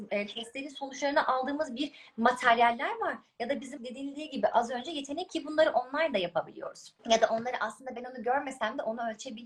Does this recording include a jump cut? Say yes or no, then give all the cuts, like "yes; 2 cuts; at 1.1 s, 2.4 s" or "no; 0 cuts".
yes; 3 cuts; at 3.8 s, 5.3 s, 7.0 s